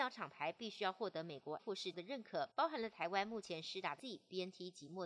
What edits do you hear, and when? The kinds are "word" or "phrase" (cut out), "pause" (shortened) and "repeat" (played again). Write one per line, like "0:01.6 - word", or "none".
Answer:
0:01.6 - word
0:01.9 - word
0:02.5 - pause
0:04.0 - word